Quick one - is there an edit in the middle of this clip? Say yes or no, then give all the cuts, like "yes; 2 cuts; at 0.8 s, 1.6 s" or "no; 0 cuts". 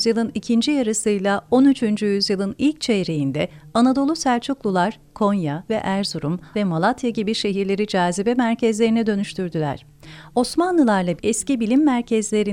yes; 3 cuts; at 5.7 s, 6.5 s, 11.2 s